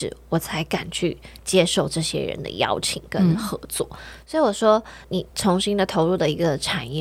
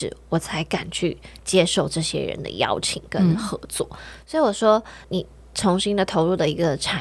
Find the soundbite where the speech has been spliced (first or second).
first